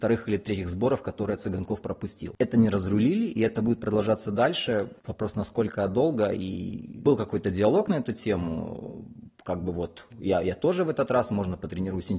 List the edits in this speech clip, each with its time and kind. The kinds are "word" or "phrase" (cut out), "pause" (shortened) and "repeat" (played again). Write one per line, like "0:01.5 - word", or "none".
0:05.0 - pause